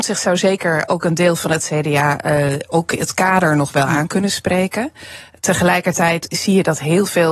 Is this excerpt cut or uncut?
uncut